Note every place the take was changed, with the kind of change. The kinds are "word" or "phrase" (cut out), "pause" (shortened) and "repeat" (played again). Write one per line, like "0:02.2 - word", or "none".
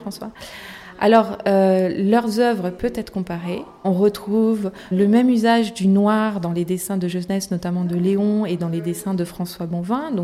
0:03.8 - word
0:04.9 - word